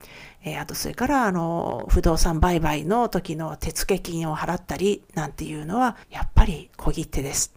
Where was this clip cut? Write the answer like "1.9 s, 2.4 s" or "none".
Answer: 6.0 s